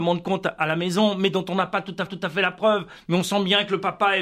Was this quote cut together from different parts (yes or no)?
yes